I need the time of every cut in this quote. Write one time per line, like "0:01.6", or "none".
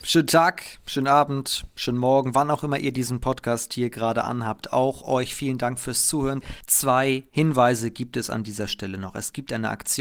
none